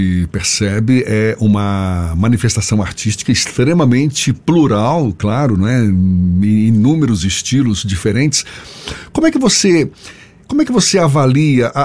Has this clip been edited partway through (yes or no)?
no